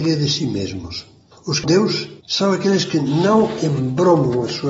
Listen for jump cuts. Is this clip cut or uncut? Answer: cut